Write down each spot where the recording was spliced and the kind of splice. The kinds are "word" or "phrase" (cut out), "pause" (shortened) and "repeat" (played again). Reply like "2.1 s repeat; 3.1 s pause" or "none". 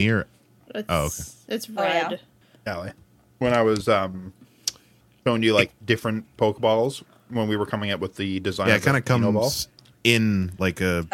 none